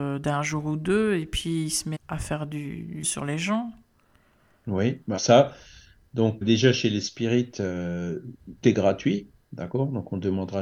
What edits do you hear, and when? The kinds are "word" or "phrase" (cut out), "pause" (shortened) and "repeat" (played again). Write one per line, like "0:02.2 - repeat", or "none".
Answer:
0:01.9 - word
0:03.0 - word
0:05.2 - word
0:06.4 - word
0:08.6 - word

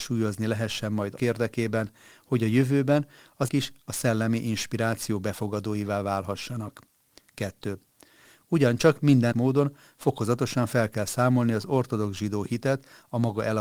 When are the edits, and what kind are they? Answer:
0:01.2 - word
0:03.5 - word
0:09.3 - word

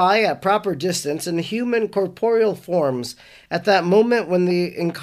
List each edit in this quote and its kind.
none

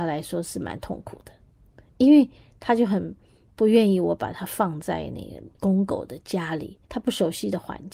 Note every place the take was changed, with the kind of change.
0:02.4 - pause
0:05.5 - pause
0:06.8 - pause

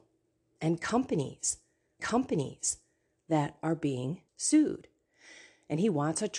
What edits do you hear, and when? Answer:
0:02.0 - repeat
0:04.3 - pause

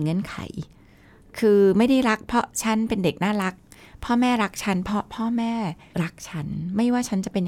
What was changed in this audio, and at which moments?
none

